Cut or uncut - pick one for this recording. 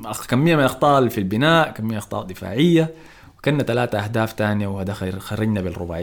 uncut